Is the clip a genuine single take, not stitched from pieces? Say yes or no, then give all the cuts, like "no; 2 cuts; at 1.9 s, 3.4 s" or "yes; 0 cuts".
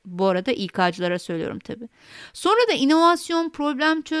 yes; 0 cuts